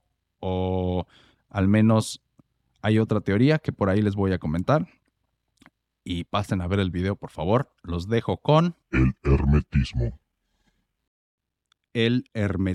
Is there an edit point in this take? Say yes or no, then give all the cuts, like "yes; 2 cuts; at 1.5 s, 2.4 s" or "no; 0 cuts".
yes; 1 cut; at 8.8 s